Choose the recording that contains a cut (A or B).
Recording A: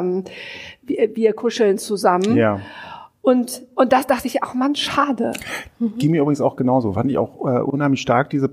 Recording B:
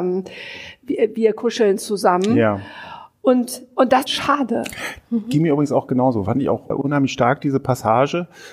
B